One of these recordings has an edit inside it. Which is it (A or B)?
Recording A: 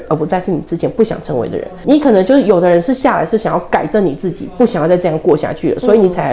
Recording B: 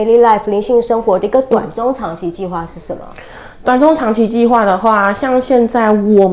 A